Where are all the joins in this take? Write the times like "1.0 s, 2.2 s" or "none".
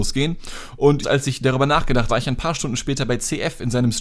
1.0 s, 2.1 s